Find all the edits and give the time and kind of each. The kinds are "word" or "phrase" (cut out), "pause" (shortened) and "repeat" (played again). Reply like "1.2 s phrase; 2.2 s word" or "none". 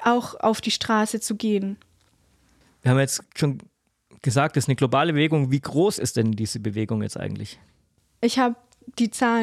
3.3 s pause